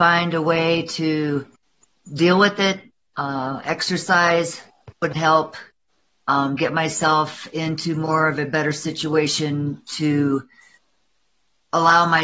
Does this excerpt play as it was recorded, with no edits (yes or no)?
yes